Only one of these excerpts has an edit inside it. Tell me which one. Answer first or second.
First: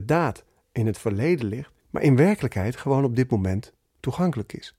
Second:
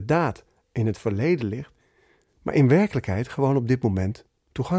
first